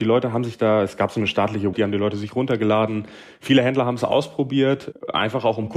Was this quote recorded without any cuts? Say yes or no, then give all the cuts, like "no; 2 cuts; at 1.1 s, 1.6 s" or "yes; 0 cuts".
no; 1 cut; at 1.7 s